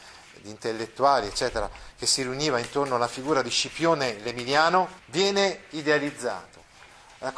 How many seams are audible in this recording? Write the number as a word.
one